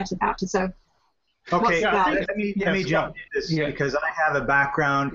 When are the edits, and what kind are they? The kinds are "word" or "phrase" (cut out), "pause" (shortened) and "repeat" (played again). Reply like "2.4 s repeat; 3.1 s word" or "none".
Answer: 2.2 s word; 3.3 s word